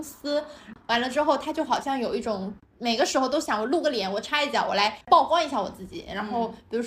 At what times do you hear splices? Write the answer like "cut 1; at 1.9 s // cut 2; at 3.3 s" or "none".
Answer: cut 1; at 5.0 s

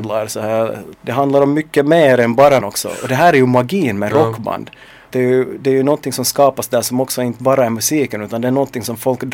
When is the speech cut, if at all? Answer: cut 1; at 0.9 s // cut 2; at 2.6 s // cut 3; at 5.1 s

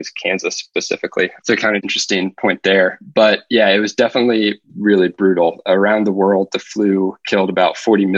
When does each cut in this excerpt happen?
cut 1; at 4.7 s

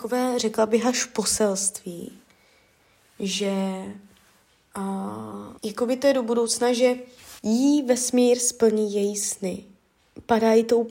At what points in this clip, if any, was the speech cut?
cut 1; at 5.6 s // cut 2; at 7.4 s

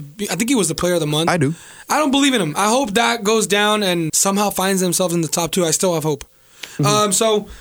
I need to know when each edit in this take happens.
cut 1; at 4.1 s

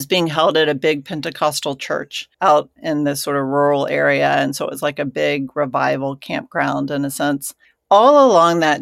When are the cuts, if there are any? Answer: cut 1; at 2.3 s // cut 2; at 7.6 s

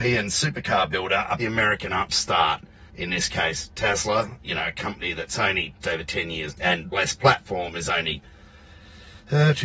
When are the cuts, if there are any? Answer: cut 1; at 1.4 s // cut 2; at 2.9 s // cut 3; at 4.4 s // cut 4; at 5.8 s // cut 5; at 6.5 s // cut 6; at 6.9 s

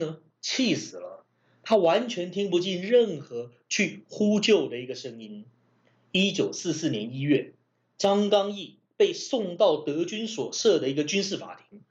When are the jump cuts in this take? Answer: none

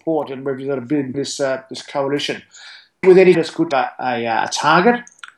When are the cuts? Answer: cut 1; at 1.1 s // cut 2; at 3.0 s // cut 3; at 3.3 s // cut 4; at 3.7 s

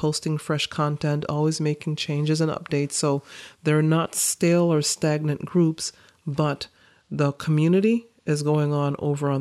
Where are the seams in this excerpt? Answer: none

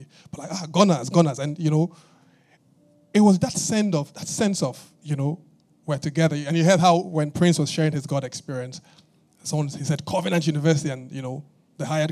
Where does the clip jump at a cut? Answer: none

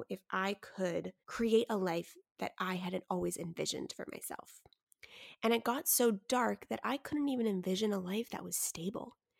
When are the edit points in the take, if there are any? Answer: cut 1; at 1.2 s

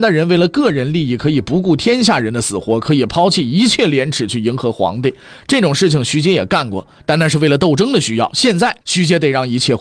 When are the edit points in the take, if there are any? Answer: cut 1; at 8.8 s

